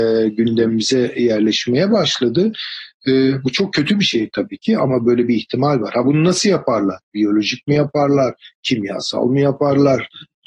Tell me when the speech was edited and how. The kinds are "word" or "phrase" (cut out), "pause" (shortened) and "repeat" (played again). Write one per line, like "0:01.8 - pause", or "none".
none